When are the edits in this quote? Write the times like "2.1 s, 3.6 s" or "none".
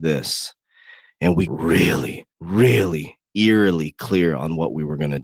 1.5 s, 2.3 s